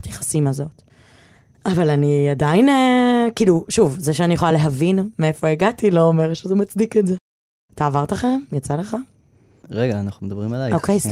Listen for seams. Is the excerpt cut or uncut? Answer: uncut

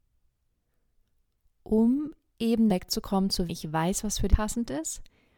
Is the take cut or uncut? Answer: cut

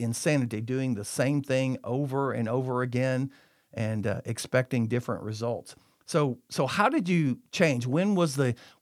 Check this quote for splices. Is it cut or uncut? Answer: uncut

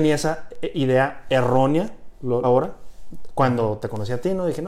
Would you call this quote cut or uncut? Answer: cut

